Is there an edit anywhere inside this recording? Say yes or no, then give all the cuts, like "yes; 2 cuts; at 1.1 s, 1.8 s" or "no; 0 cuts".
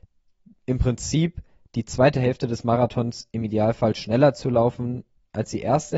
no; 0 cuts